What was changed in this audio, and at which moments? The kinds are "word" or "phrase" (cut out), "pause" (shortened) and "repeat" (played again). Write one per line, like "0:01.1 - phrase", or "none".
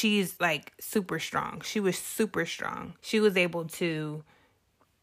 0:03.0 - pause